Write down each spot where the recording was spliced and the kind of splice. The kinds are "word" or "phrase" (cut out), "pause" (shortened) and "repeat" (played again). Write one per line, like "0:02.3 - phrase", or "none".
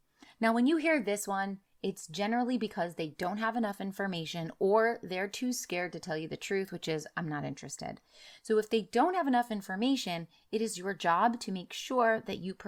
none

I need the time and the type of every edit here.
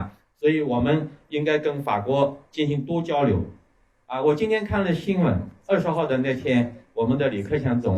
none

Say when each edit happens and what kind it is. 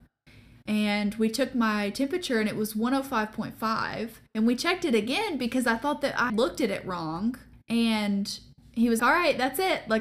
0:06.3 - word
0:07.5 - pause
0:09.0 - word

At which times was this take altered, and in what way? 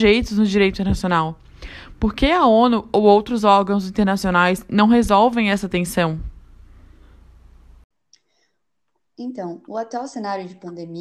none

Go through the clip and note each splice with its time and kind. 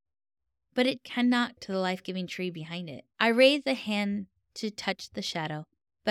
0:01.6 - word
0:03.1 - pause

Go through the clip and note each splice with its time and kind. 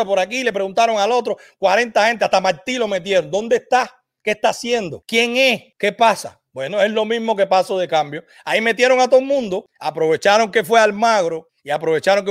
none

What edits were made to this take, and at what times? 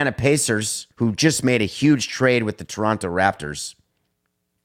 0:00.9 - pause

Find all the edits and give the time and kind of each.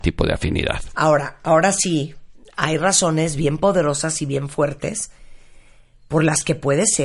none

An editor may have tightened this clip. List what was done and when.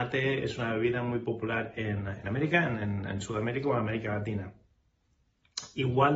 none

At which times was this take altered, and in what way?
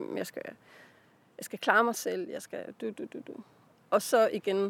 none

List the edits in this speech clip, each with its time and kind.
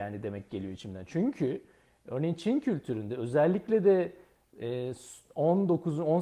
none

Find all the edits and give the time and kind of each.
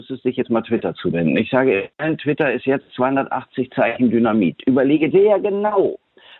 0:05.1 - word

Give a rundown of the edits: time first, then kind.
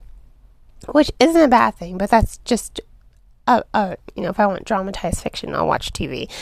none

